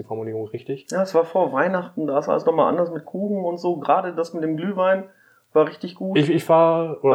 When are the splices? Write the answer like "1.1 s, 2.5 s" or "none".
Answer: none